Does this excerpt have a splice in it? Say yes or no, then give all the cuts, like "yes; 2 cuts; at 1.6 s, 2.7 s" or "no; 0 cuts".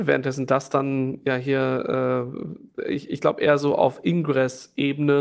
no; 0 cuts